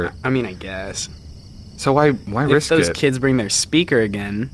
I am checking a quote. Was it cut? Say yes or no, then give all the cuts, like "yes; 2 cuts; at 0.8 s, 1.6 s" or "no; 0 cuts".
no; 0 cuts